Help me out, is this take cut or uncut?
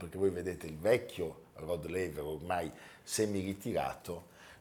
uncut